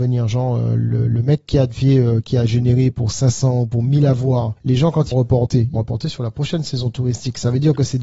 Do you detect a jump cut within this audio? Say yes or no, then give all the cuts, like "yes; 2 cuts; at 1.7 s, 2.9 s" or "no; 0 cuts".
yes; 3 cuts; at 4.6 s, 5.1 s, 5.8 s